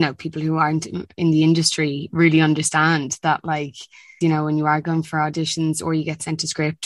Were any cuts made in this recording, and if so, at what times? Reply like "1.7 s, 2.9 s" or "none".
4.2 s